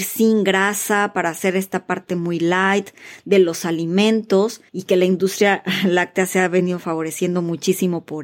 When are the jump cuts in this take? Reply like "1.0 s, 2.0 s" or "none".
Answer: 4.7 s